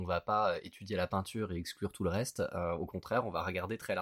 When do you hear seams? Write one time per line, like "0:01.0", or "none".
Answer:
none